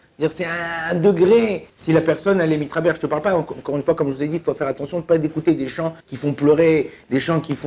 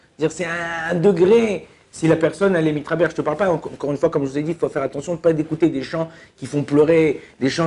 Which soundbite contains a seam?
first; 2 cuts; at 1.7 s, 6.0 s

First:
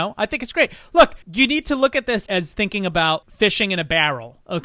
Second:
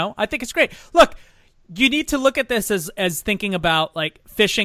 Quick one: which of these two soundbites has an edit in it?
first; 3 cuts; at 1.2 s, 2.3 s, 3.2 s

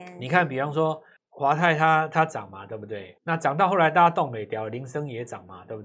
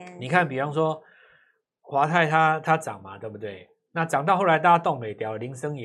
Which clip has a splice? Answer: first; 2 cuts; at 1.2 s, 3.2 s

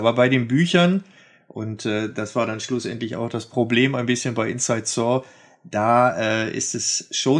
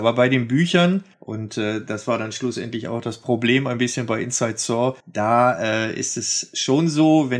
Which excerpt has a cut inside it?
second; 2 cuts; at 1.1 s, 5.0 s

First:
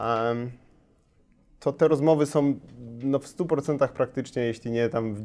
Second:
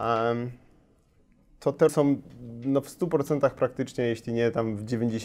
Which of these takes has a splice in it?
second; 1 cut; at 1.9 s

